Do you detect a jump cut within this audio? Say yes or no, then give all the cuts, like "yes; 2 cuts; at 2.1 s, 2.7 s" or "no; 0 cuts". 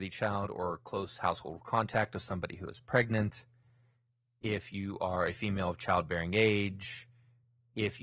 no; 0 cuts